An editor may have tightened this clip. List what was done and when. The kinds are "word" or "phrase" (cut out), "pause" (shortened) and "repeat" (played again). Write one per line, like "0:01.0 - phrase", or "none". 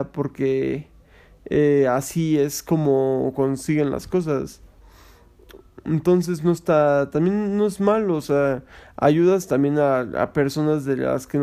none